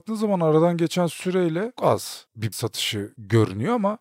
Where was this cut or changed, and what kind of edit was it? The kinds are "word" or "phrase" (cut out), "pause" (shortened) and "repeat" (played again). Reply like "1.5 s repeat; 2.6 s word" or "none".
1.8 s word; 2.5 s word